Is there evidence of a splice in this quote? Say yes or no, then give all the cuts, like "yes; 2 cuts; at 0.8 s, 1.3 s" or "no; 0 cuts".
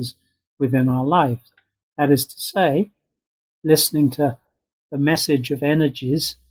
no; 0 cuts